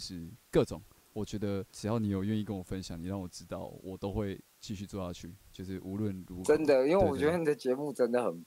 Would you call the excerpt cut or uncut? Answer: cut